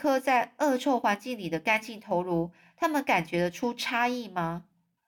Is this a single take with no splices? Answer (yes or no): yes